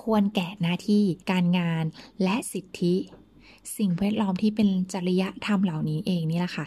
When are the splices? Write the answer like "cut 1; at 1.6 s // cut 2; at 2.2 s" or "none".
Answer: cut 1; at 1.2 s